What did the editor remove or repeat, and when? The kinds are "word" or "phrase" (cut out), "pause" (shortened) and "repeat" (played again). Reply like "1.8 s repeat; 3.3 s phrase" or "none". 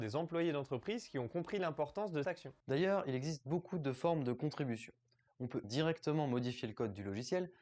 2.2 s word; 5.6 s word